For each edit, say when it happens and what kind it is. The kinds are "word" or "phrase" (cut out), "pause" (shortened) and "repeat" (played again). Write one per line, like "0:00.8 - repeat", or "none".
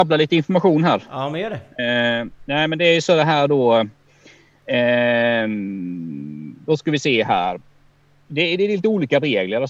none